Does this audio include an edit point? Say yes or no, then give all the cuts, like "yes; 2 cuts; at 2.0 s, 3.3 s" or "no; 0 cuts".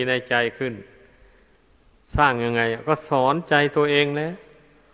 no; 0 cuts